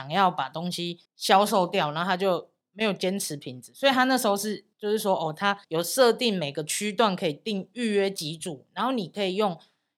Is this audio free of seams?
no; 3 cuts; at 1.1 s, 4.7 s, 5.6 s

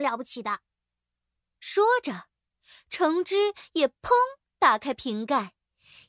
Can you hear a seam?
no; 0 cuts

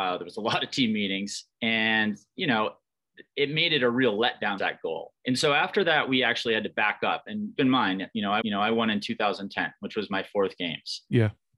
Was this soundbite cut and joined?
yes; 5 cuts; at 1.5 s, 4.6 s, 5.2 s, 7.6 s, 8.4 s

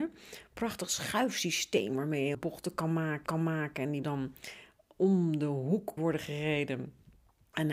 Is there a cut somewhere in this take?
yes; 4 cuts; at 2.3 s, 3.3 s, 4.0 s, 6.0 s

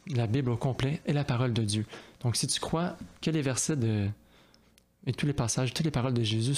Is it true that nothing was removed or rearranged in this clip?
no; 1 cut; at 3.1 s

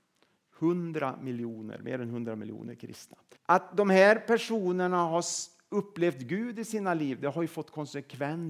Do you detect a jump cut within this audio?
yes; 1 cut; at 3.3 s

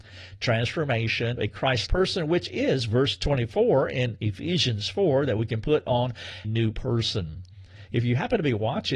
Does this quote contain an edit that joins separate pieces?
yes; 3 cuts; at 1.4 s, 1.9 s, 6.4 s

